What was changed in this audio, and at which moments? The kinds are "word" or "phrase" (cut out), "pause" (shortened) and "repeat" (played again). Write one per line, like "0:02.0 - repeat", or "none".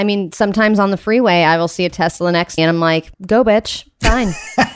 0:02.6 - word
0:03.1 - pause